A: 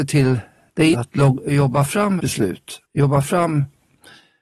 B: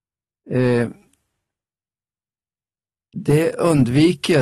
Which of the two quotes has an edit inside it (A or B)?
A